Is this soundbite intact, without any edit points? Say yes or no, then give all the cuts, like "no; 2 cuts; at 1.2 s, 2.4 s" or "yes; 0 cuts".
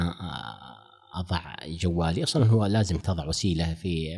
yes; 0 cuts